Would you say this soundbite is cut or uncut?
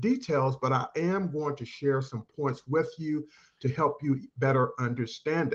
uncut